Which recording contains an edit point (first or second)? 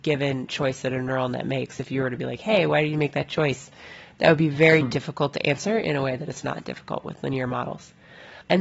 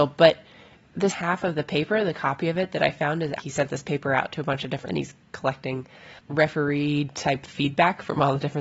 second